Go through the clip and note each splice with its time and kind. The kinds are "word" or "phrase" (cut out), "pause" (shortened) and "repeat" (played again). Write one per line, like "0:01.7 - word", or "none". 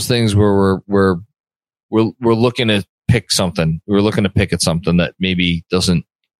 none